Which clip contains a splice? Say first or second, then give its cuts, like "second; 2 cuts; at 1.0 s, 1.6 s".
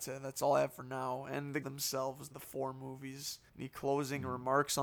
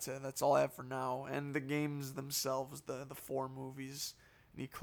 first; 3 cuts; at 1.6 s, 2.3 s, 3.5 s